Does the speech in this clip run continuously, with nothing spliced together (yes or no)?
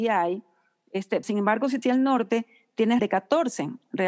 no